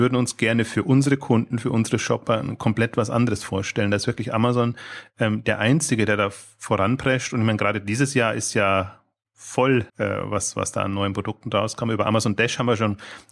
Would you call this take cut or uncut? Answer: cut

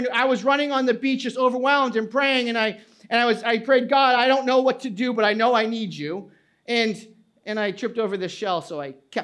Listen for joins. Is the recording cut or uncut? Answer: uncut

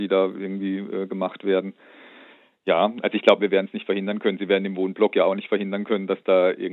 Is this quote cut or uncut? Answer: uncut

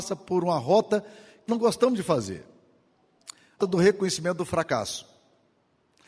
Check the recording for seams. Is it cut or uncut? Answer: cut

